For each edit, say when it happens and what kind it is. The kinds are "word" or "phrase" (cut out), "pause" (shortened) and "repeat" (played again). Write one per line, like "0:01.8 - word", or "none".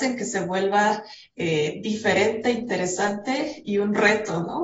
none